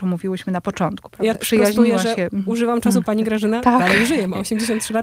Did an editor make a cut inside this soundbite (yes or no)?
yes